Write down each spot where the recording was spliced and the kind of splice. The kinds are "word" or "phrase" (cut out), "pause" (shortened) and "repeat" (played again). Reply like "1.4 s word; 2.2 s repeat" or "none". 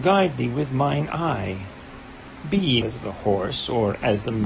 2.8 s word